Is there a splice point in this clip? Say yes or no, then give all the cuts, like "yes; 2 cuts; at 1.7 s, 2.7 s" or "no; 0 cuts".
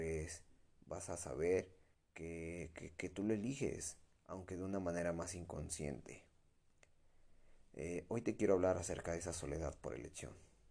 yes; 1 cut; at 1.9 s